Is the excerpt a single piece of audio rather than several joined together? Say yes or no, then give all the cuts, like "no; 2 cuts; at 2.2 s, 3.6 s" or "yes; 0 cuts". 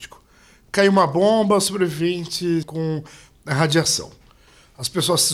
no; 1 cut; at 2.6 s